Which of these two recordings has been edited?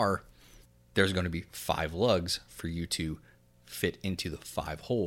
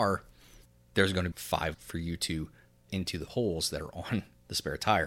second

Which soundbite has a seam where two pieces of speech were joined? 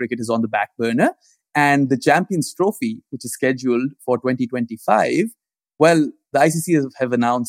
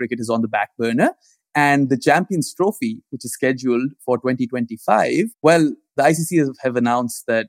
second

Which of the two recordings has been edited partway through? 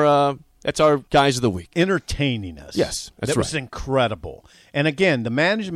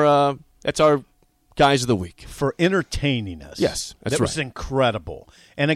first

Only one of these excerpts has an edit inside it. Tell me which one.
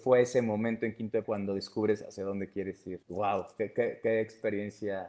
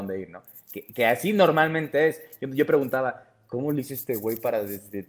first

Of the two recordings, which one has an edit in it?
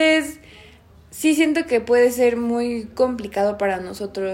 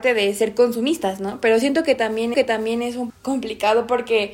second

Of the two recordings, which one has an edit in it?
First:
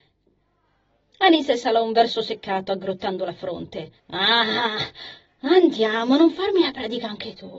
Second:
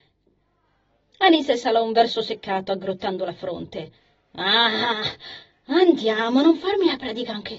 first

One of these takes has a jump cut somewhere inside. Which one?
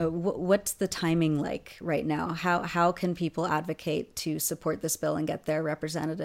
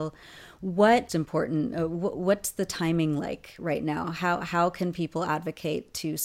second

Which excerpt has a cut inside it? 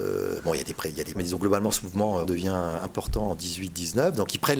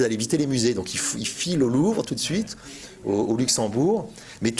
first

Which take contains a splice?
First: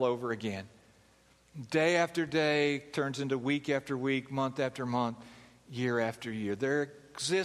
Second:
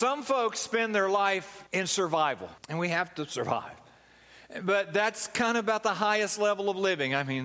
second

